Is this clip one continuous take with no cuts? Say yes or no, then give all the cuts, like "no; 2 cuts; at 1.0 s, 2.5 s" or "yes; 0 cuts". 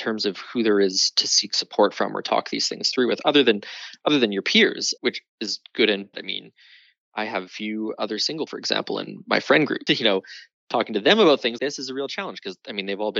no; 6 cuts; at 5.0 s, 6.1 s, 7.5 s, 8.5 s, 9.9 s, 11.6 s